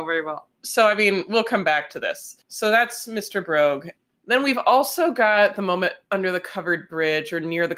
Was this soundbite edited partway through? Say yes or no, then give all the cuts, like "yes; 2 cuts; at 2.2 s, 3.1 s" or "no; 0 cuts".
no; 0 cuts